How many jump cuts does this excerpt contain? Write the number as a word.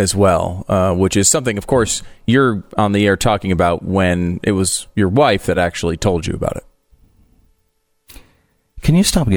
zero